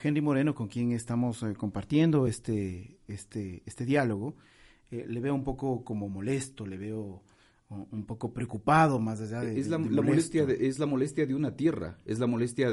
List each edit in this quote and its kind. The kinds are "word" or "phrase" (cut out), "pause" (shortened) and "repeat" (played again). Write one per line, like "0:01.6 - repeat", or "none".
none